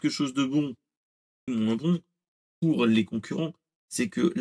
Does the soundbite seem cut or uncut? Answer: cut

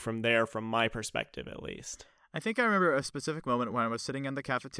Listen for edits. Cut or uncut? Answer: uncut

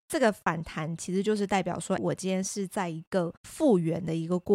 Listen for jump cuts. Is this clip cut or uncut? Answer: cut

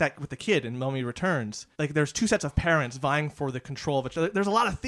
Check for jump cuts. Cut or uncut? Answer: cut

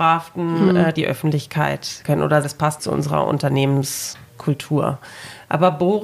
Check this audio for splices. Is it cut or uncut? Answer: cut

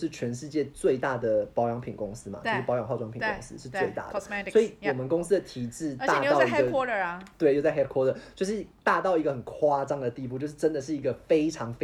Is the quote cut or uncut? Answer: uncut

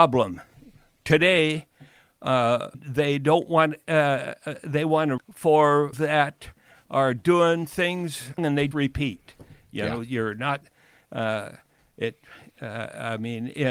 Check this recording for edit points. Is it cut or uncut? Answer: cut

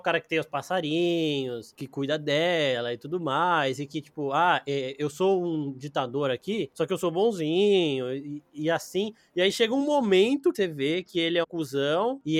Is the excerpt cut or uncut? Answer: cut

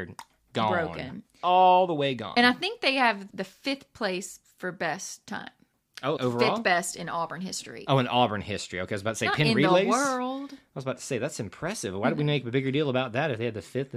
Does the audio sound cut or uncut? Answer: cut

